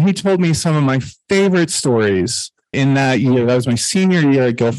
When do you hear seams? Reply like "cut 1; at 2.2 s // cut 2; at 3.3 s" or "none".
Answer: cut 1; at 2.7 s